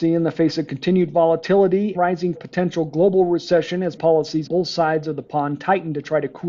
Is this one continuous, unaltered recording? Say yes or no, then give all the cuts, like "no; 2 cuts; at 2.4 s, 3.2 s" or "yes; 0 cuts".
no; 4 cuts; at 1.9 s, 2.3 s, 4.0 s, 4.5 s